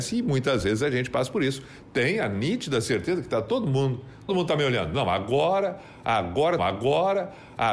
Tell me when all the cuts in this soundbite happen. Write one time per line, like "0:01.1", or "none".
0:04.3
0:06.6